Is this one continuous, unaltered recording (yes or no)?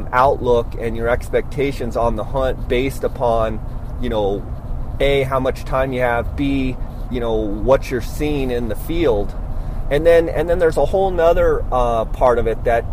no